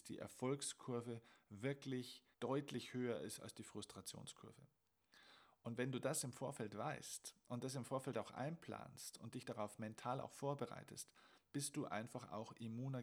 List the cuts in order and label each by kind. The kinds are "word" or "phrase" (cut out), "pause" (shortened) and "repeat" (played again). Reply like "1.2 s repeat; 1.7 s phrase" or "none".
2.3 s pause